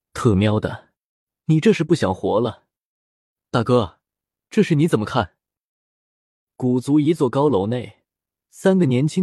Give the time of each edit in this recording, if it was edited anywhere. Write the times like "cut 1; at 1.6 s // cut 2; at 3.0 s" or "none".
none